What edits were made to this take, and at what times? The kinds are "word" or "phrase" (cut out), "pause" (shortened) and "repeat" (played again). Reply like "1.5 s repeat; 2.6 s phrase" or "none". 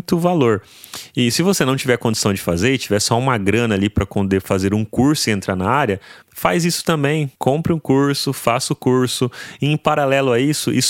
6.2 s pause; 7.4 s pause